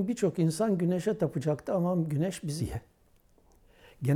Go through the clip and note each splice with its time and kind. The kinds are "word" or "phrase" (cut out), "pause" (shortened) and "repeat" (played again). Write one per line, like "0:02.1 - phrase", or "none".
0:02.6 - word